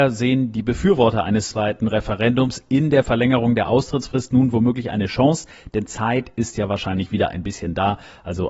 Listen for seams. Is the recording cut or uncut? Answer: uncut